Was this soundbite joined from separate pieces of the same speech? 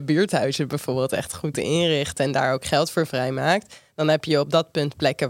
no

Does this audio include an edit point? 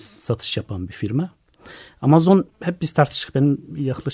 yes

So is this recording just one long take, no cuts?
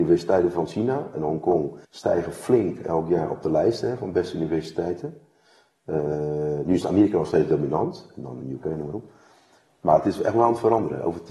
no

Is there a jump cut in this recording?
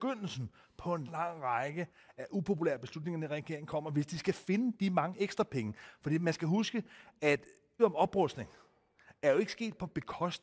yes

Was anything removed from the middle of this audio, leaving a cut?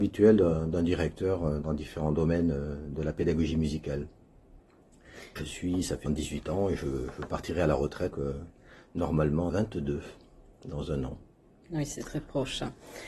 yes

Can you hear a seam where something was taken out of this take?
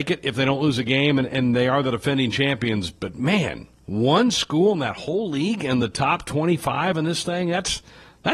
no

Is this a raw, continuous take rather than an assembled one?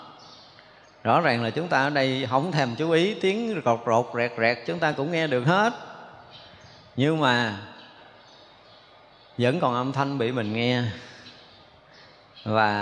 yes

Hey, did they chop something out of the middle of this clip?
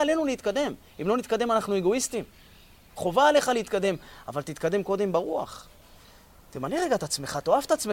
no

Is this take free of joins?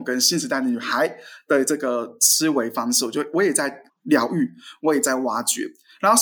no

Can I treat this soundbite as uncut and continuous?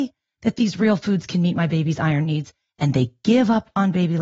yes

